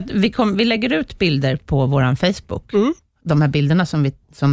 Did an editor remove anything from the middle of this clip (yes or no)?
no